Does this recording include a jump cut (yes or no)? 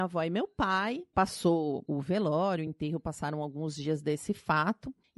no